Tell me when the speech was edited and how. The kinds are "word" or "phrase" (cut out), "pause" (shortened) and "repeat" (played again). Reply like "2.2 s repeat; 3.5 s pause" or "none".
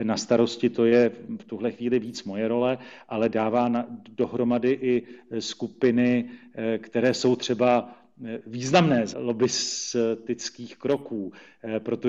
9.1 s word